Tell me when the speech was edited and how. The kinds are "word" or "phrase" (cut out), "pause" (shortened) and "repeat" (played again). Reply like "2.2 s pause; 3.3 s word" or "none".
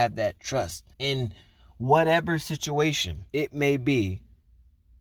0.9 s pause; 3.3 s pause